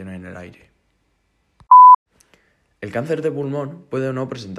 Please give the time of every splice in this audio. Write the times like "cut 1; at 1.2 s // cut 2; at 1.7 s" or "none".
none